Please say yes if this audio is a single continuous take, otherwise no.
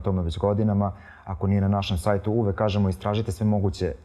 yes